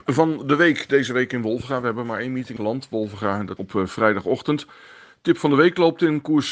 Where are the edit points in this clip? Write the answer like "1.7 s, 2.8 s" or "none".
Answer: 2.6 s, 3.6 s